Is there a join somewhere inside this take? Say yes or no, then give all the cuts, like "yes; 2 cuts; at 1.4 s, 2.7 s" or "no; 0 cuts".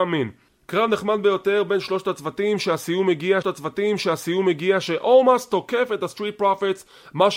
yes; 1 cut; at 3.4 s